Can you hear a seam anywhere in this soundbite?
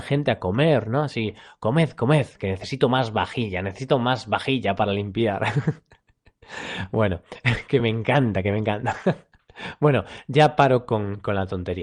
no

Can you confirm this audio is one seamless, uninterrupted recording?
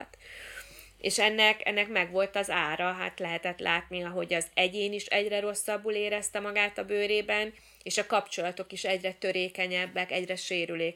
yes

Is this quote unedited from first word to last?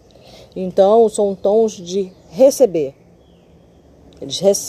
yes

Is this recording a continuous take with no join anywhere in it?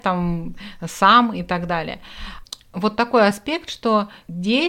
yes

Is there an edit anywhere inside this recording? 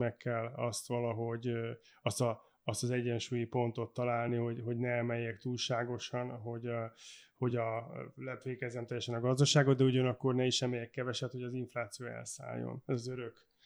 no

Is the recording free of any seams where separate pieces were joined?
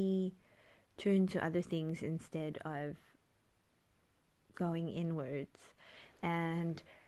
yes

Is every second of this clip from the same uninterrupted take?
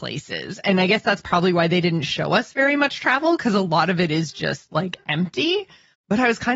yes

